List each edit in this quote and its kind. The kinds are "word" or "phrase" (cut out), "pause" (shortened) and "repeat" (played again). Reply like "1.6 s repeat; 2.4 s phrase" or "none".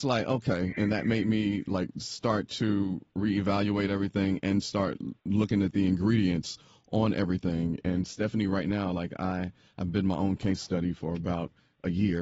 5.2 s pause